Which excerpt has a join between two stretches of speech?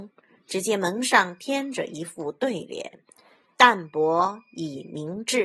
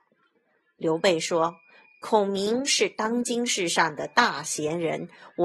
first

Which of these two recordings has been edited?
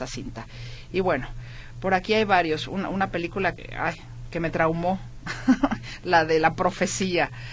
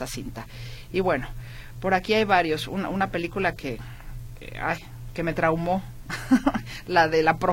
first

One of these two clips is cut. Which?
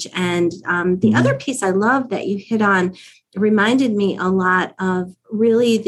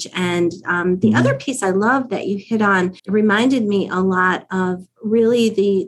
second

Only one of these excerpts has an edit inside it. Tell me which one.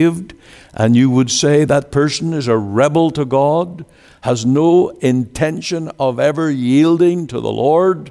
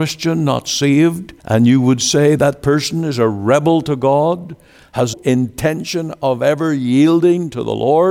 second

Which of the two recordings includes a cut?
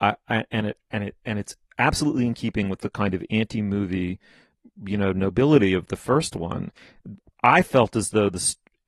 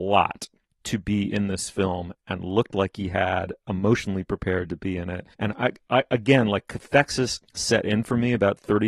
second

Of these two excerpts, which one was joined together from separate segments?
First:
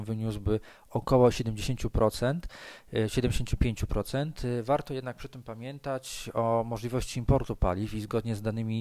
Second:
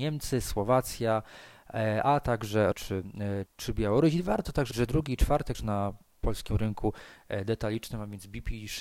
second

